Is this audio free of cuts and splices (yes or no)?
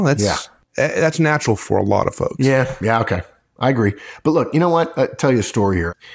yes